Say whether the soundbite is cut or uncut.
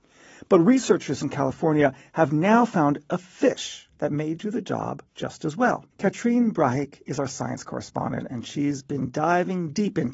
cut